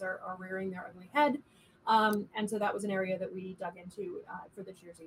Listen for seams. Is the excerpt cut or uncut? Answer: uncut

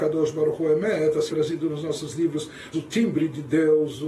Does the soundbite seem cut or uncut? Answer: cut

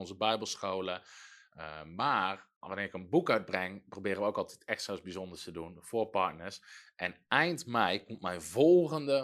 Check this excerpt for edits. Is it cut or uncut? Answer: cut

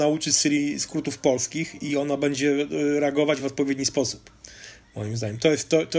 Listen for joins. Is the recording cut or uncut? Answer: uncut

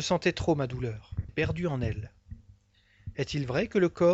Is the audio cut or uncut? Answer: cut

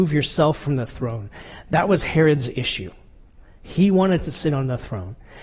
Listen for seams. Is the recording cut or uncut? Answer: uncut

